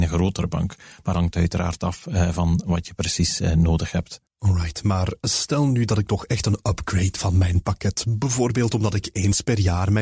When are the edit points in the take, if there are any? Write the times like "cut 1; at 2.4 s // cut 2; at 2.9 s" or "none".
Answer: cut 1; at 1.1 s // cut 2; at 4.3 s // cut 3; at 7.2 s